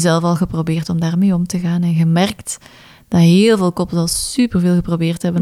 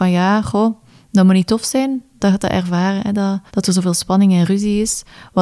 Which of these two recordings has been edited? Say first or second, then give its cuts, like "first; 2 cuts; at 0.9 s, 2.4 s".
second; 1 cut; at 3.5 s